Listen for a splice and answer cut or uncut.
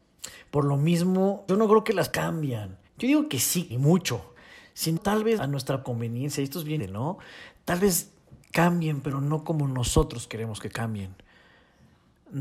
cut